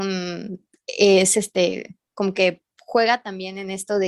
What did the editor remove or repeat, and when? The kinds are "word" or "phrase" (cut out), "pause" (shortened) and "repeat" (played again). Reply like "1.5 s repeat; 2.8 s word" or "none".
none

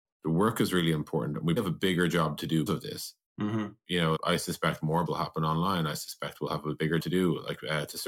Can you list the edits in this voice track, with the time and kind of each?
1.6 s word; 2.7 s word; 4.2 s word; 5.1 s word; 7.0 s word

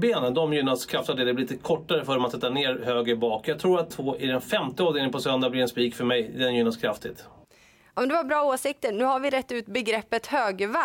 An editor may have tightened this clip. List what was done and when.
3.9 s phrase

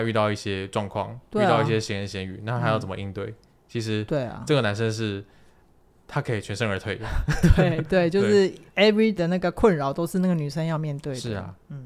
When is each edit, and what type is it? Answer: 9.2 s word

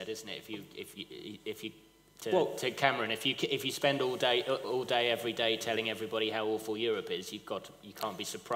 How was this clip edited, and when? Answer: none

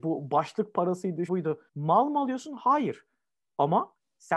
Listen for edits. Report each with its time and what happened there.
1.3 s word; 1.7 s pause

